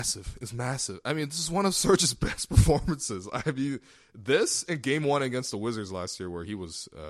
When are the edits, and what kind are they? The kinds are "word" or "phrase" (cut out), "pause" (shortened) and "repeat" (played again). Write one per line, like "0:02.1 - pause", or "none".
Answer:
none